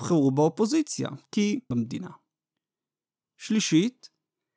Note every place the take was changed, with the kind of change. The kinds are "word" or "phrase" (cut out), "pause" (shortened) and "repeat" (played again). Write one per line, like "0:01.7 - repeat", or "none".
0:01.7 - phrase